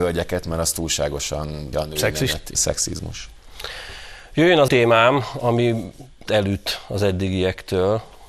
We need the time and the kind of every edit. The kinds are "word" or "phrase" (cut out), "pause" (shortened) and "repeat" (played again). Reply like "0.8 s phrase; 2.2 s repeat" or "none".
1.7 s word; 2.5 s word; 4.7 s word; 6.3 s word